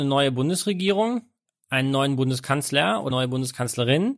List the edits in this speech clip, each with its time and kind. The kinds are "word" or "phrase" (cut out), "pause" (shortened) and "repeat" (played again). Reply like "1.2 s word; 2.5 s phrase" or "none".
3.1 s word